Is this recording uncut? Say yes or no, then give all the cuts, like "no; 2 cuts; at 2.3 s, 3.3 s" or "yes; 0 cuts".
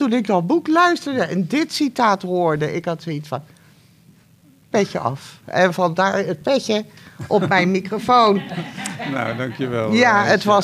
yes; 0 cuts